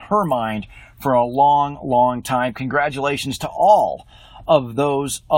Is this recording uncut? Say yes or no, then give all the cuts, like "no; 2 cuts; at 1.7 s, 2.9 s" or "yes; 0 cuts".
yes; 0 cuts